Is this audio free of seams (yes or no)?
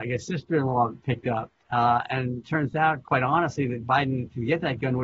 no